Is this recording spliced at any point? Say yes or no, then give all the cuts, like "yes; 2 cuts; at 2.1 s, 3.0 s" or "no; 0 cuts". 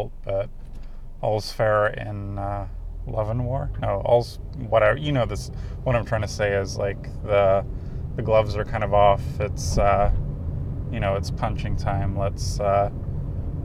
no; 0 cuts